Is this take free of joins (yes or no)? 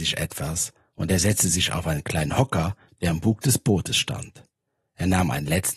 yes